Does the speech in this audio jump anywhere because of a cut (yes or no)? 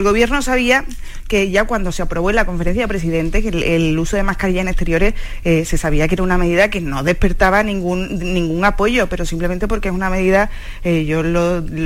no